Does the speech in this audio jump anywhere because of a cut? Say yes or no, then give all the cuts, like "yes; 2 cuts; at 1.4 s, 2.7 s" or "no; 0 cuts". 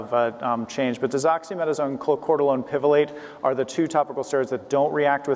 no; 0 cuts